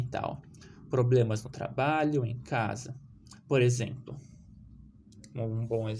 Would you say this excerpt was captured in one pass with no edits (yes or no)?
yes